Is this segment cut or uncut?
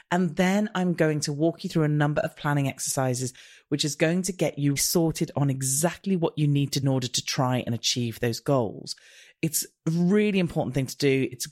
cut